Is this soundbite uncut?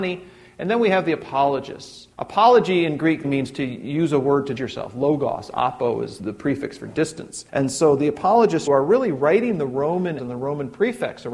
no; 7 cuts; at 2.1 s, 3.2 s, 4.6 s, 6.2 s, 7.5 s, 8.7 s, 10.2 s

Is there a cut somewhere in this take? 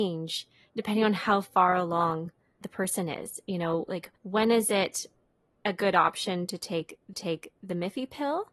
yes; 3 cuts; at 2.6 s, 4.2 s, 7.1 s

